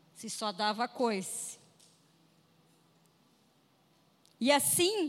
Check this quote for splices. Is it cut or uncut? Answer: uncut